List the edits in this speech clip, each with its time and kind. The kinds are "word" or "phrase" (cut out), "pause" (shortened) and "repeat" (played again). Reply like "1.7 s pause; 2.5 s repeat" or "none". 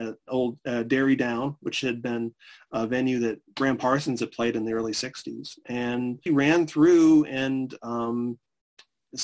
6.3 s word

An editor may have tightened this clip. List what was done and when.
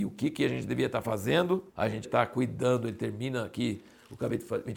1.7 s pause; 2.0 s word

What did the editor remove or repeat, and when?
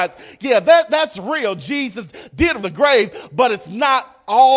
2.6 s phrase

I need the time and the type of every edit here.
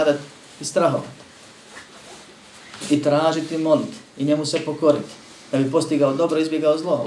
none

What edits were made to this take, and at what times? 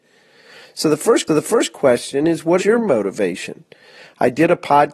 1.3 s repeat; 2.6 s word

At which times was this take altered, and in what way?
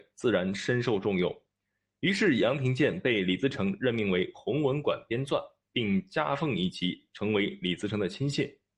none

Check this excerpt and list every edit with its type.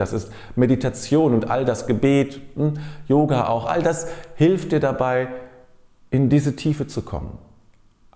none

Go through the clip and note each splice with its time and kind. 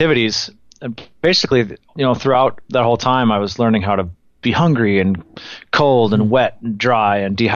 none

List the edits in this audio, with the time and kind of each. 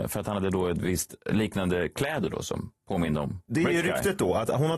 2.8 s pause

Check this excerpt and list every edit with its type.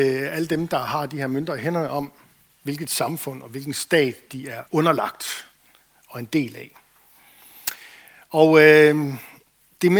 4.7 s pause

